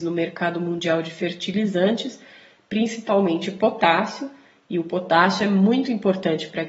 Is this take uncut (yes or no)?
yes